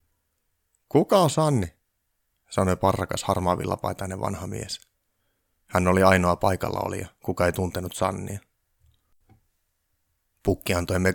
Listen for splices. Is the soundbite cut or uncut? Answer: uncut